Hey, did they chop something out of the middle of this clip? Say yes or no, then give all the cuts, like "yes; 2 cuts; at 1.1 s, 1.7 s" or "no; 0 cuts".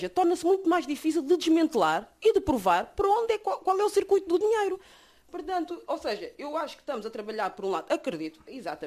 no; 0 cuts